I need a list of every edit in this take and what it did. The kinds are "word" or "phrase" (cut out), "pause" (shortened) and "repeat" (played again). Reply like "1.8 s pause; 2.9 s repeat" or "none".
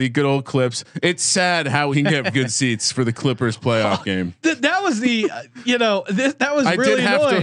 1.9 s phrase; 2.3 s word